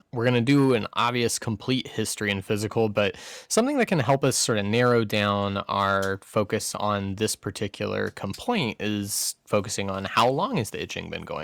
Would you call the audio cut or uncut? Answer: cut